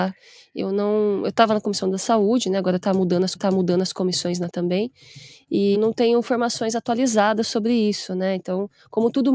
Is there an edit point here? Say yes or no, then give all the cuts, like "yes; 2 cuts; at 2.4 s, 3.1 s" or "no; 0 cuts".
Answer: yes; 3 cuts; at 3.4 s, 4.5 s, 5.7 s